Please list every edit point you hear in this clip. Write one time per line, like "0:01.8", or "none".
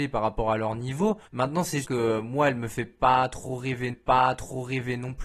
0:01.3
0:01.8
0:03.9